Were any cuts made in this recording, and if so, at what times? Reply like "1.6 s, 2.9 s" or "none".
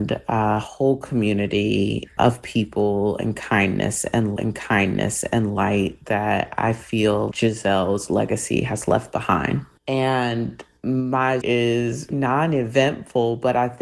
4.4 s, 7.3 s, 11.4 s, 12.1 s